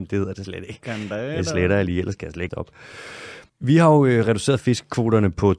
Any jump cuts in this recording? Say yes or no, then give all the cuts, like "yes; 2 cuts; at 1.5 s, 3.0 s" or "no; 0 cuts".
yes; 2 cuts; at 2.5 s, 3.5 s